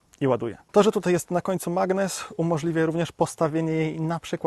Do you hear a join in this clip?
no; 0 cuts

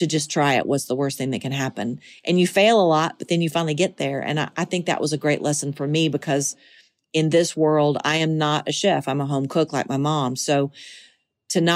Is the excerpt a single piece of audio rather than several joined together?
yes; 0 cuts

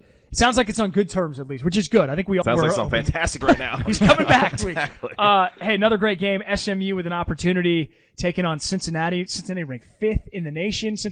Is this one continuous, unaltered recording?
no; 3 cuts; at 2.4 s, 3.4 s, 4.6 s

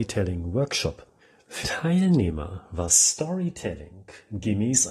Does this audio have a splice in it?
yes; 1 cut; at 1.6 s

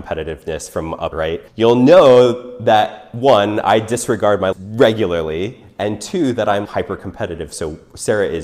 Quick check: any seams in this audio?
yes; 4 cuts; at 1.1 s, 1.5 s, 4.5 s, 6.6 s

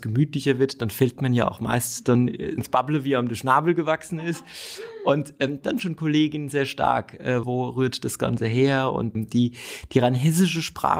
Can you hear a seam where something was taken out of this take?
yes; 4 cuts; at 2.6 s, 5.8 s, 7.4 s, 9.1 s

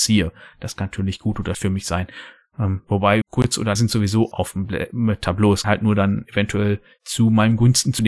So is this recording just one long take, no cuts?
no; 5 cuts; at 1.5 s, 3.2 s, 3.8 s, 4.3 s, 5.6 s

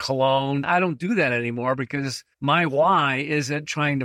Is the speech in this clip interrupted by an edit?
yes; 1 cut; at 2.3 s

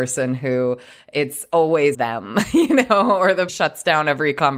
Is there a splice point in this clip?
yes; 2 cuts; at 1.9 s, 3.5 s

